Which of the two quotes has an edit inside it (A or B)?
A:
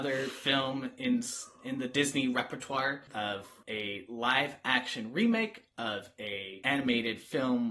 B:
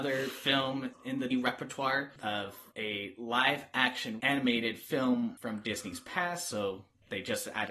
B